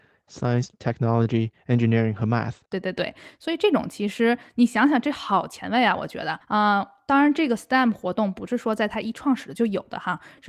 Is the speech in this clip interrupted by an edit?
yes; 2 cuts; at 2.7 s, 6.4 s

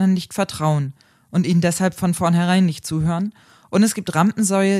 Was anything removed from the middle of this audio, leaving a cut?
no; 0 cuts

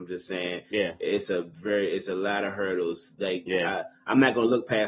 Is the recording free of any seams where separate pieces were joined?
yes; 0 cuts

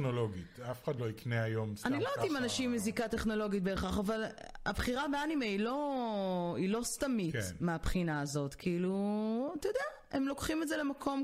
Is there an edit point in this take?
no; 0 cuts

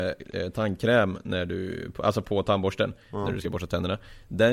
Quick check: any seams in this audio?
no; 0 cuts

